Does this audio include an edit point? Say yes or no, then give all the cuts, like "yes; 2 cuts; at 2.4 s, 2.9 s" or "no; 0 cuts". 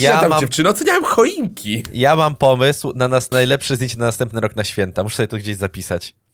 yes; 1 cut; at 3.3 s